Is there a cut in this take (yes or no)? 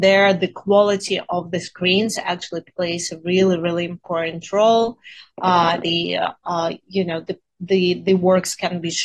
no